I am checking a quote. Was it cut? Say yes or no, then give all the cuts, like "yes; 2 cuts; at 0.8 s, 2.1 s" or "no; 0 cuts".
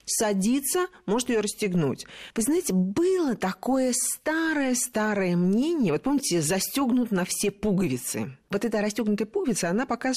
yes; 1 cut; at 8.4 s